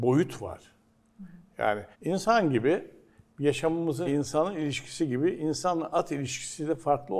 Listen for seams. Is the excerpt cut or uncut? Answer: cut